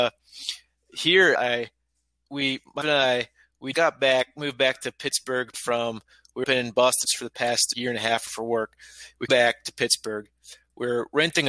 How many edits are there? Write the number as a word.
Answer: nine